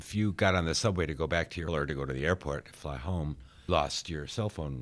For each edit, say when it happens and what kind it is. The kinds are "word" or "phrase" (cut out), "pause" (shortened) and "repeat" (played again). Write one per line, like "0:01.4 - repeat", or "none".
0:01.7 - word
0:03.7 - word